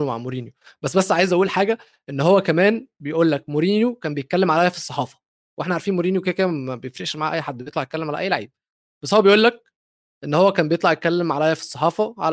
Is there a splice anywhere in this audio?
no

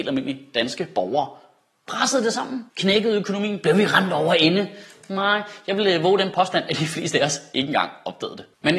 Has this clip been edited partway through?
yes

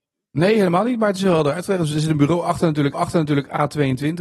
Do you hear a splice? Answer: yes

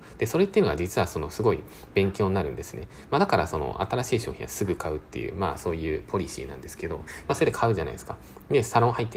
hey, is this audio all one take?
yes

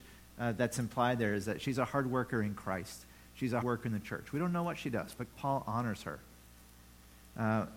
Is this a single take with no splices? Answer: no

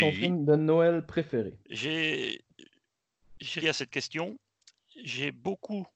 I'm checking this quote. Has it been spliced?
yes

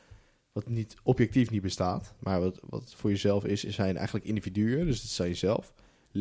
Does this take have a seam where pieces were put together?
no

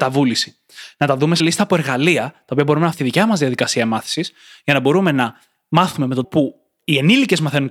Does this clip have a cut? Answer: yes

